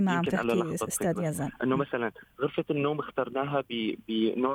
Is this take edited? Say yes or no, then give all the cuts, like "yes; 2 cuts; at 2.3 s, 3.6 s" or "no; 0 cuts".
no; 0 cuts